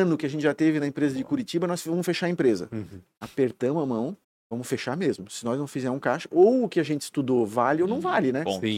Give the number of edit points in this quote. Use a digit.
1